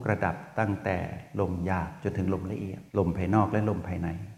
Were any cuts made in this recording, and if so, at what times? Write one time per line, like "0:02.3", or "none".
0:02.9